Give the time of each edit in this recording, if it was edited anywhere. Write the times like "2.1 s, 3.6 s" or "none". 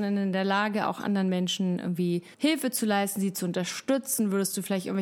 2.3 s